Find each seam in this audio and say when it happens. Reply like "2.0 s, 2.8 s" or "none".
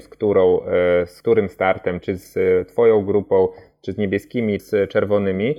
2.0 s, 4.6 s